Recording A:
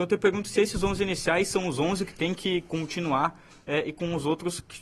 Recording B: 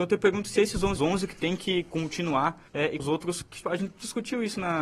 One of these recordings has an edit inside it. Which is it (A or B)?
B